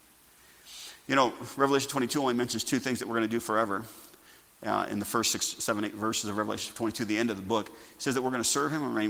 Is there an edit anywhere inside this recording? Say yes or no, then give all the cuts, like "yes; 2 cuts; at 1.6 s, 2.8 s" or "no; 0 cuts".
no; 0 cuts